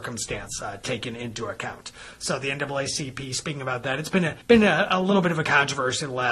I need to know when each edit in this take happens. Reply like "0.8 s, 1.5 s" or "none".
4.4 s